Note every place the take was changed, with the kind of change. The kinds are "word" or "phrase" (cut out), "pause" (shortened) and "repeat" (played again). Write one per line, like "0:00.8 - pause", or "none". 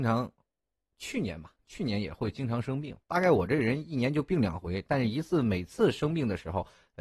0:03.0 - pause